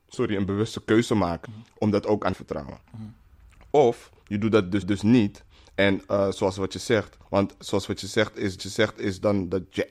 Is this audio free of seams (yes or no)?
no